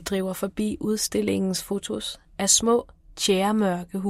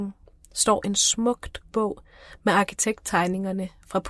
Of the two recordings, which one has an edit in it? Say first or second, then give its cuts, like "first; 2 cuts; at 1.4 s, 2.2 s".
second; 1 cut; at 1.7 s